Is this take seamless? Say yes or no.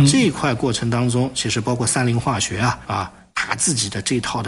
no